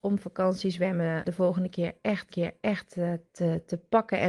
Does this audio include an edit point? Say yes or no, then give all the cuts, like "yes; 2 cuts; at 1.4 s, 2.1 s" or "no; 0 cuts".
yes; 2 cuts; at 1.2 s, 2.3 s